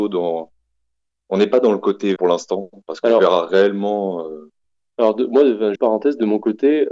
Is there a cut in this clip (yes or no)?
yes